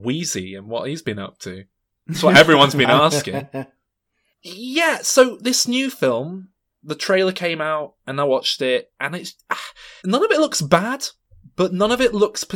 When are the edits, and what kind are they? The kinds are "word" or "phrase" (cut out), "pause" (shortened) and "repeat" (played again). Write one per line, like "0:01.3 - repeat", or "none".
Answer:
0:10.0 - pause